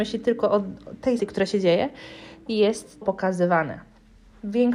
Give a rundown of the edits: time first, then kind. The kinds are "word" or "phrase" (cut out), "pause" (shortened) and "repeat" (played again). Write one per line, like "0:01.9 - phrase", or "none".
0:01.2 - word
0:02.5 - word
0:03.0 - word